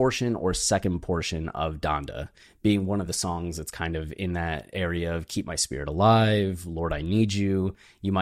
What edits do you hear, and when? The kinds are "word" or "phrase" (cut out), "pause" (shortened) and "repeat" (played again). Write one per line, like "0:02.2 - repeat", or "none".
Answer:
none